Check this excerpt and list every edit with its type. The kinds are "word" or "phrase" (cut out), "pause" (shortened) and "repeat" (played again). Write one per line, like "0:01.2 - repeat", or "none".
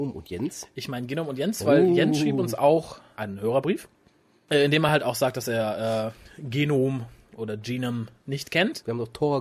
none